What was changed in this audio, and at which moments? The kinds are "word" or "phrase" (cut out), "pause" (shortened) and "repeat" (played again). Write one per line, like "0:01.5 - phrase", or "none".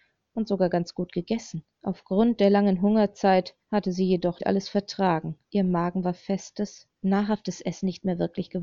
0:01.7 - pause
0:03.6 - pause
0:04.4 - word
0:05.4 - pause

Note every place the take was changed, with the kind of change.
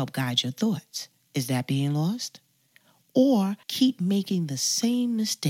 0:01.2 - pause
0:03.6 - pause

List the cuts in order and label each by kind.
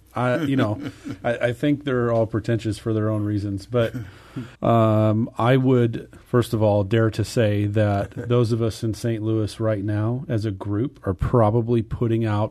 0:04.5 - pause
0:06.2 - pause

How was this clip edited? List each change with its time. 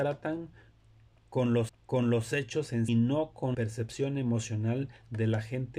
0:01.7 - repeat
0:02.9 - phrase
0:03.5 - word

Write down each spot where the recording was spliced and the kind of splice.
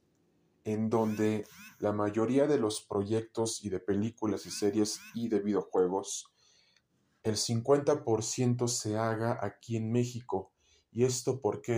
none

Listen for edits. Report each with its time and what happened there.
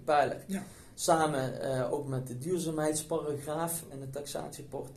0:03.9 - word

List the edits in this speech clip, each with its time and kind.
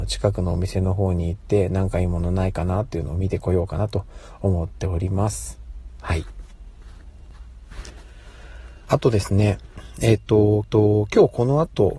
0:10.6 - repeat

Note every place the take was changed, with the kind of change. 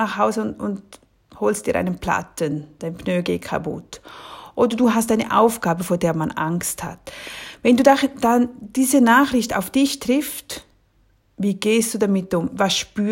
none

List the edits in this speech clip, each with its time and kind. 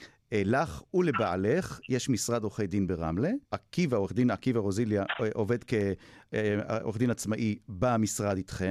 0:03.4 - pause

